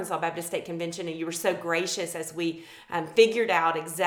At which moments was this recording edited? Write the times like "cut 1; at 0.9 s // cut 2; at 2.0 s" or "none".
none